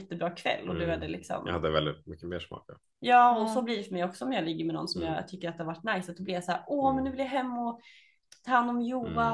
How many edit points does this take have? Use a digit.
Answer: 0